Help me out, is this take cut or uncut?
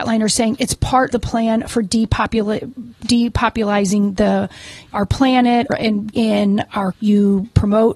cut